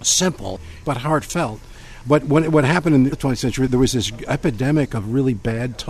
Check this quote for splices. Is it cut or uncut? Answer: cut